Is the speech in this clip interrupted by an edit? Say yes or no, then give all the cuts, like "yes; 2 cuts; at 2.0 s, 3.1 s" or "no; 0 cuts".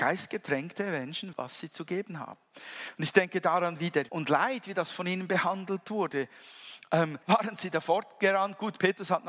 yes; 3 cuts; at 1.3 s, 4.1 s, 7.2 s